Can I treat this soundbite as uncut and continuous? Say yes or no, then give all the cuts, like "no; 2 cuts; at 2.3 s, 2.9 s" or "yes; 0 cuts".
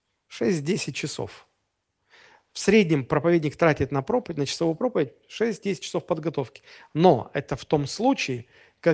yes; 0 cuts